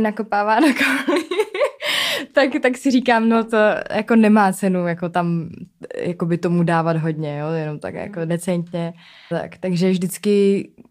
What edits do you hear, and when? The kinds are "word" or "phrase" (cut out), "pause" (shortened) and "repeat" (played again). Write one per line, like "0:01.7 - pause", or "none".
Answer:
0:09.3 - word